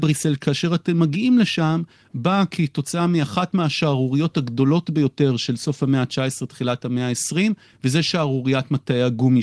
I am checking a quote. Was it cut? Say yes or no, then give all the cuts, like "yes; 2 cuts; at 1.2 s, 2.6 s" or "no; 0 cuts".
no; 0 cuts